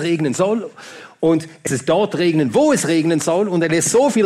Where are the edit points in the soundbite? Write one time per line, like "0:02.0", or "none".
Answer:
0:01.7